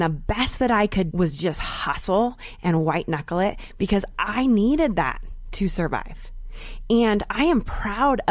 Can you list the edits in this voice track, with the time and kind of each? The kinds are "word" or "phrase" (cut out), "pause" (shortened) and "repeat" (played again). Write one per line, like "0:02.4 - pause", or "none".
0:01.1 - word